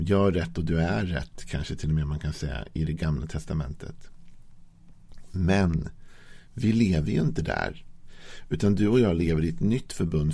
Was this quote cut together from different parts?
no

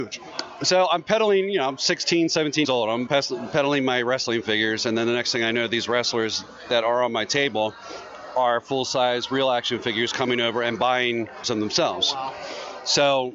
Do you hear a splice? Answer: yes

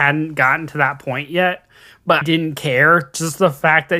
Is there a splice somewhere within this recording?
yes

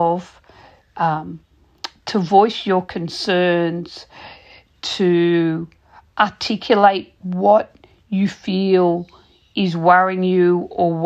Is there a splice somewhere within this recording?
no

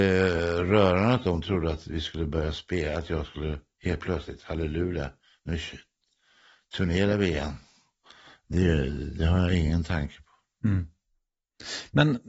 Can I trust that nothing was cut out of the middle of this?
yes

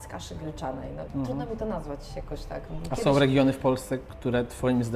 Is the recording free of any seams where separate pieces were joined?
yes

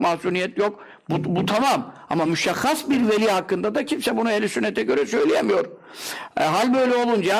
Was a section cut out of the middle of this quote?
no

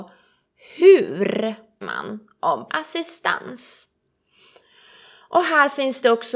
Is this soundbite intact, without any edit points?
no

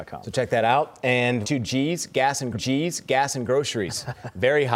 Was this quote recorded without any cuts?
no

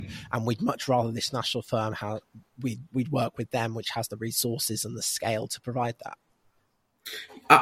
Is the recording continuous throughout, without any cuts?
no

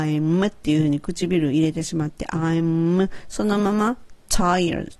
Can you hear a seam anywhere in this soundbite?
no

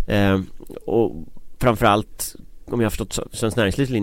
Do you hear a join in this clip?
no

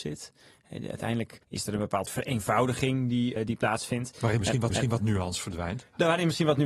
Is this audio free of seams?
no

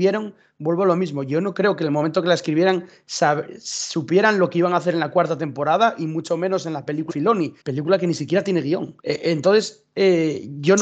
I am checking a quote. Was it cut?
yes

